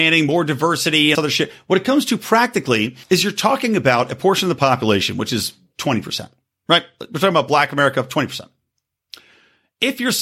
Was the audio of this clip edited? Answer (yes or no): yes